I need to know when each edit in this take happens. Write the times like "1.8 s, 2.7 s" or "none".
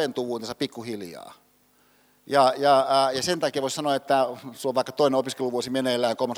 none